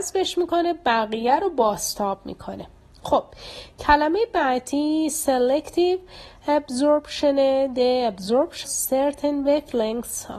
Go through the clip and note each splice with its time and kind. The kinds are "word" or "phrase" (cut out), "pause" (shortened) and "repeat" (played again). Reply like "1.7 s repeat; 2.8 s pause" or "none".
8.6 s word